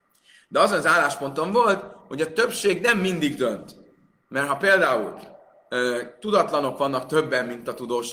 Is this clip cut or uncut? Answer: uncut